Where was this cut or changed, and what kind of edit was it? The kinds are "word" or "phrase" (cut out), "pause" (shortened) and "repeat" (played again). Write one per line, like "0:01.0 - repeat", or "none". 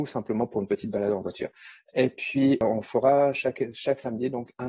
none